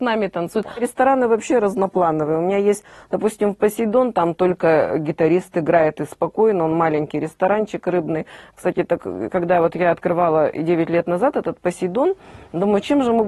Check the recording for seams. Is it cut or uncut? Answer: uncut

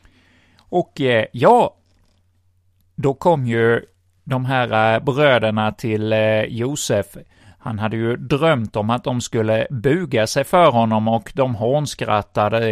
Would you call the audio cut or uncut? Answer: uncut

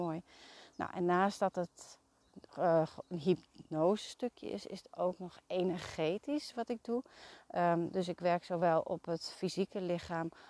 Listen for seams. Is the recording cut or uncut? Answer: uncut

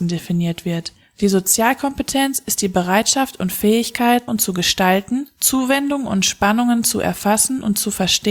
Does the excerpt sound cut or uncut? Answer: cut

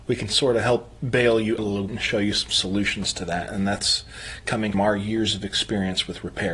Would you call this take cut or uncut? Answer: cut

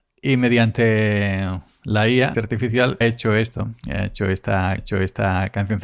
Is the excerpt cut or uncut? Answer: cut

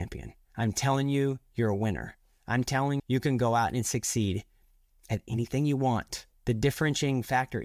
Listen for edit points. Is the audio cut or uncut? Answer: cut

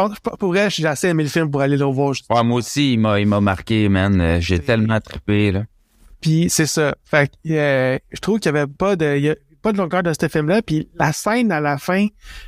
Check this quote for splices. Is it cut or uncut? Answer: uncut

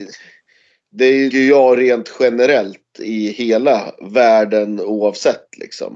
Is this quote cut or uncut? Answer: cut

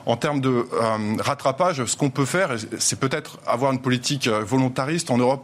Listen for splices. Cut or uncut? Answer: uncut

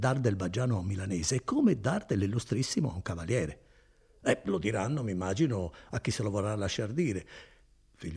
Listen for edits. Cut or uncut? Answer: uncut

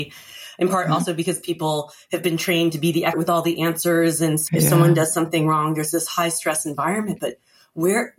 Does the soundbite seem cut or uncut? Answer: cut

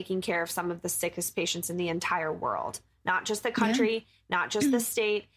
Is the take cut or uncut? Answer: uncut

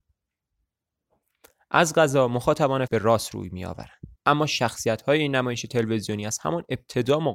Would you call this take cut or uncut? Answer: cut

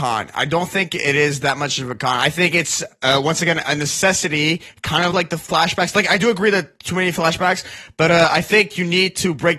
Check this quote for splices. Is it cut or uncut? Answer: uncut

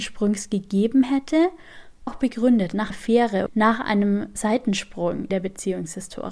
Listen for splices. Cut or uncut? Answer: cut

